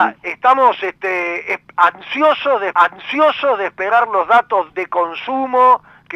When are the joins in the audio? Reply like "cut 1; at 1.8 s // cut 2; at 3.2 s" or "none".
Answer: cut 1; at 2.7 s // cut 2; at 4.7 s